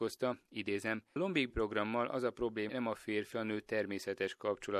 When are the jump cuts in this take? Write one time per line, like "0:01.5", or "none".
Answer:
0:01.2
0:01.5
0:02.7
0:03.3